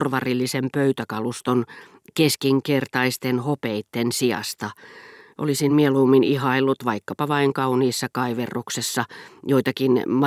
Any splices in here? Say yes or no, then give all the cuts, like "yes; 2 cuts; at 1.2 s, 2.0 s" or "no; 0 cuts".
no; 0 cuts